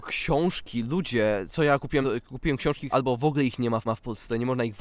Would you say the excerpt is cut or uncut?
cut